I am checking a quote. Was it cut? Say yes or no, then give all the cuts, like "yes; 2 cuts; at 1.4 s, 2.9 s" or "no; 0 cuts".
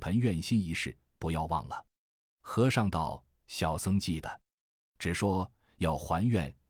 no; 0 cuts